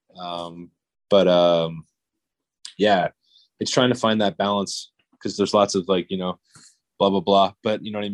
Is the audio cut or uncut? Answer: uncut